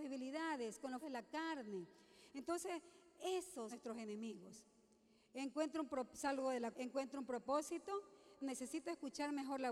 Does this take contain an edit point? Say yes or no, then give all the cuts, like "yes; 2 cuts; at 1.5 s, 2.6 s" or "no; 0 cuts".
yes; 4 cuts; at 1.0 s, 3.7 s, 6.7 s, 8.4 s